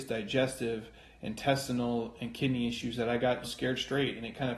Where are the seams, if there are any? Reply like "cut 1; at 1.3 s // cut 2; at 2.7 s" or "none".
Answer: cut 1; at 3.4 s